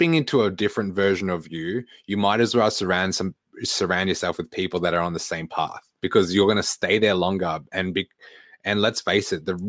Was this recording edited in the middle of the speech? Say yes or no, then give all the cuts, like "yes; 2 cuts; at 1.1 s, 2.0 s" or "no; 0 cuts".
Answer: yes; 1 cut; at 6.0 s